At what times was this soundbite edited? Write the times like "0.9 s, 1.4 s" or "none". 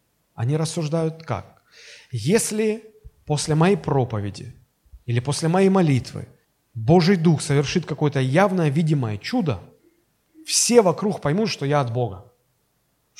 6.4 s

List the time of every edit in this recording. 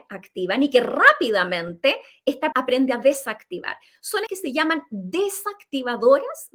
2.5 s, 4.3 s

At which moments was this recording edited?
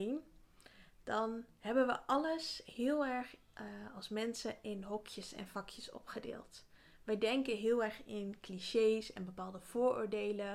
none

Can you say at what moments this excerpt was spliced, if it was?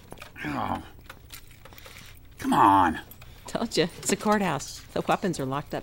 2.3 s

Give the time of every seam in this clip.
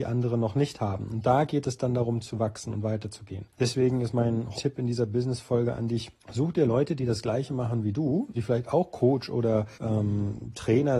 3.5 s, 4.5 s, 6.2 s, 8.3 s, 9.7 s

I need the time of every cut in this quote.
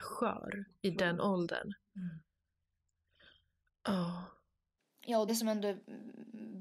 4.8 s, 5.3 s

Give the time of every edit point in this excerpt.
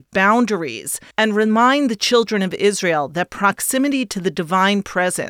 1.1 s

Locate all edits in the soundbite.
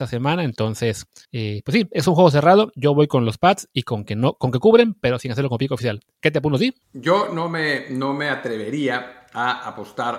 1.2 s, 6.8 s

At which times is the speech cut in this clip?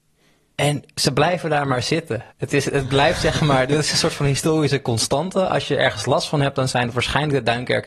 2.3 s

